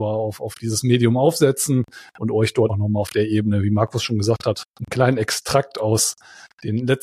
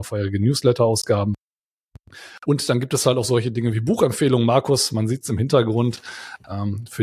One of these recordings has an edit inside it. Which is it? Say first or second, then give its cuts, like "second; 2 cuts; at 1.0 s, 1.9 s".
first; 2 cuts; at 2.7 s, 4.7 s